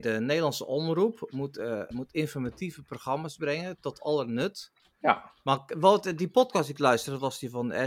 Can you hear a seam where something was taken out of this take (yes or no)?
yes